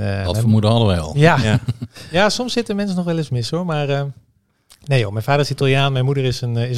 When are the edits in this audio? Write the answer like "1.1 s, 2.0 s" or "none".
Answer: none